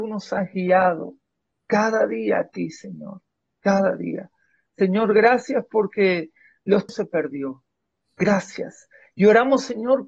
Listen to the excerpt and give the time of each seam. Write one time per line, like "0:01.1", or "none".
0:06.9